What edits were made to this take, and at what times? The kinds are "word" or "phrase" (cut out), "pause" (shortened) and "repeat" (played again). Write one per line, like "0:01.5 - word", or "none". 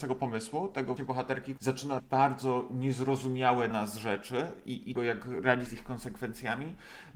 0:01.0 - word
0:01.6 - word
0:02.0 - word
0:03.7 - word
0:05.0 - word
0:05.7 - word